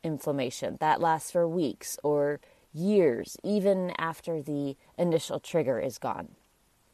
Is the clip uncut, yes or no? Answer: yes